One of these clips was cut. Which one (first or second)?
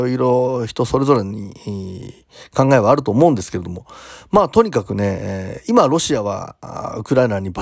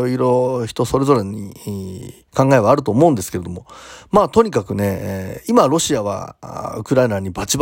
second